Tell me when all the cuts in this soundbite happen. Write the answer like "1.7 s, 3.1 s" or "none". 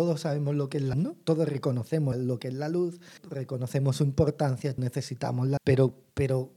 0.9 s, 2.1 s, 3.2 s, 4.8 s, 5.6 s